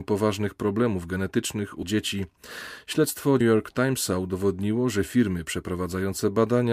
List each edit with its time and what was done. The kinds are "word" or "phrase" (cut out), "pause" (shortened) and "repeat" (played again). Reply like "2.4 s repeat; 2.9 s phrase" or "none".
1.8 s phrase; 3.4 s phrase